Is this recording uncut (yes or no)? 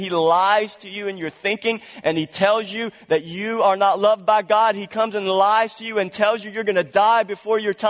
yes